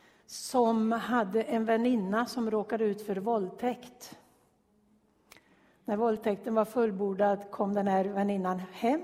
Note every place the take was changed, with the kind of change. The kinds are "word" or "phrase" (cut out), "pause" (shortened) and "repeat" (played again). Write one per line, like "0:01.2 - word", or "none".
none